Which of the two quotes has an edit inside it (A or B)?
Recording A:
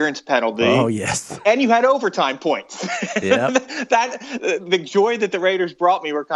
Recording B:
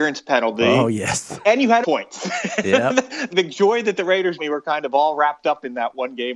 B